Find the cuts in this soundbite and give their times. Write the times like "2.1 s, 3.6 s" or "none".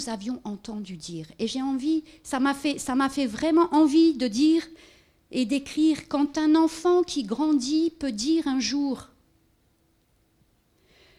none